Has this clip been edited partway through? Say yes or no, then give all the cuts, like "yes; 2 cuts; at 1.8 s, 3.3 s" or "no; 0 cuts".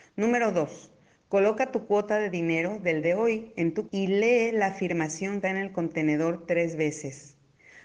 yes; 3 cuts; at 3.0 s, 3.8 s, 5.4 s